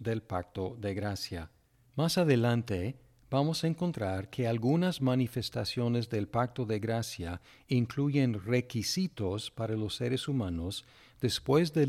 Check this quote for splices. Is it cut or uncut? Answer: uncut